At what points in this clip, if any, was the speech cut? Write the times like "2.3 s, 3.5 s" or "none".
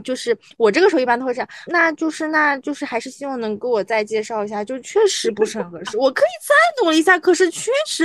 1.7 s